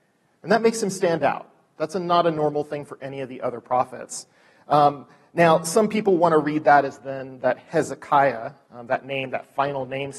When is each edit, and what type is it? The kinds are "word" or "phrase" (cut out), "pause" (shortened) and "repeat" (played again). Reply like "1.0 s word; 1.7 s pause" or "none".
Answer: none

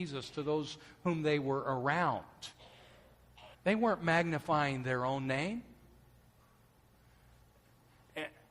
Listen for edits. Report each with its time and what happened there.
3.5 s pause

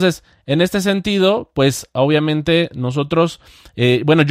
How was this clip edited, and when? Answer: none

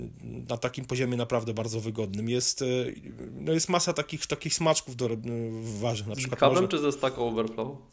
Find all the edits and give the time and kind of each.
none

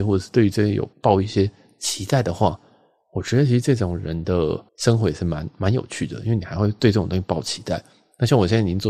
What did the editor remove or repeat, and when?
0.9 s pause; 4.7 s pause

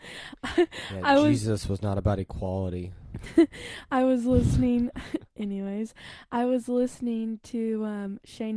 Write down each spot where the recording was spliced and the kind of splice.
none

